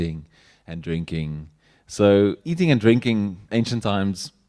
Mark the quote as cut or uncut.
cut